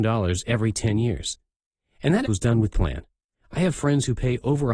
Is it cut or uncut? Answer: cut